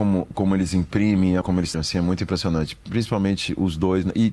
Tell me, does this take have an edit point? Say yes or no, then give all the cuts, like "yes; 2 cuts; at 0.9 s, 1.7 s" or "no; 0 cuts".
yes; 2 cuts; at 1.4 s, 1.7 s